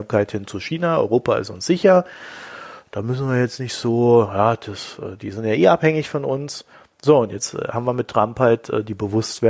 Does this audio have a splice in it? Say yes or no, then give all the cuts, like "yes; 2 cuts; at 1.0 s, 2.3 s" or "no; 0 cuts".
no; 0 cuts